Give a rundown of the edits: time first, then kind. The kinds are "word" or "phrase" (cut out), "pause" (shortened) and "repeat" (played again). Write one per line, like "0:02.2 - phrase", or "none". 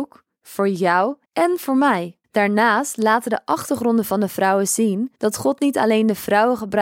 0:01.2 - pause
0:02.2 - pause
0:05.2 - pause